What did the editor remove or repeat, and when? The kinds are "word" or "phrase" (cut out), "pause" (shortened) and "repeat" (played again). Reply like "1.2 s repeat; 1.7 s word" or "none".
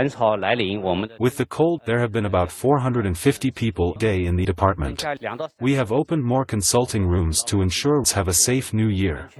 1.8 s word; 4.0 s word; 4.4 s word; 8.0 s word